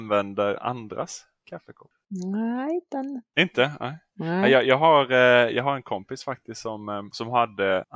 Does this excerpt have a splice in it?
no; 0 cuts

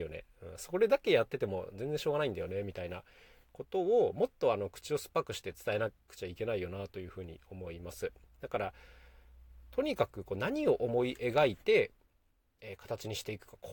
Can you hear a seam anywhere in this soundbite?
no; 0 cuts

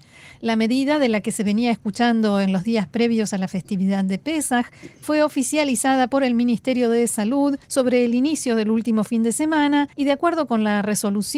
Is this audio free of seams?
no; 2 cuts; at 7.6 s, 9.9 s

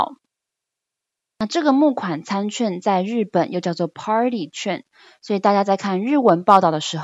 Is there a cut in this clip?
no; 0 cuts

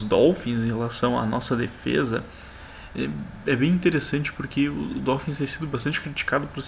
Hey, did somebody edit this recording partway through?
no; 0 cuts

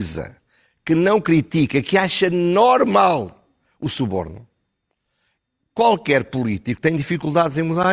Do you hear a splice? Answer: no; 0 cuts

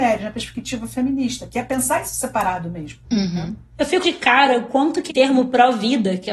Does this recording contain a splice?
yes; 3 cuts; at 3.0 s, 4.0 s, 5.1 s

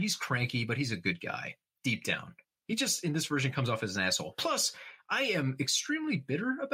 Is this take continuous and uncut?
yes; 0 cuts

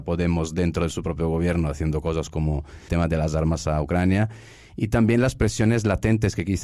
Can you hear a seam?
yes; 1 cut; at 2.9 s

